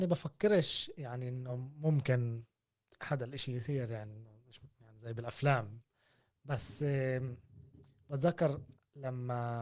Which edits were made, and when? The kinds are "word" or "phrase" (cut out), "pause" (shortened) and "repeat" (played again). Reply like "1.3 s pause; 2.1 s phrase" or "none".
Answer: none